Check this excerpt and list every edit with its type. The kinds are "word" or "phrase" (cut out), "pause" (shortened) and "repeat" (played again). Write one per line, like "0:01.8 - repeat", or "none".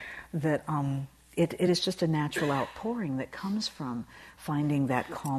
none